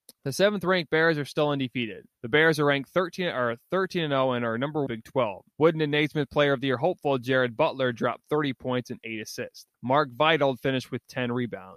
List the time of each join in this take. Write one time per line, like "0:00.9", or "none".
0:02.1
0:04.9
0:05.5
0:09.7